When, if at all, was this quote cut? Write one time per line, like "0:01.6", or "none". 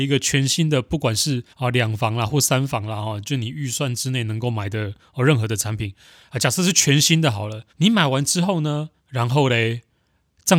0:01.5
0:07.7
0:09.0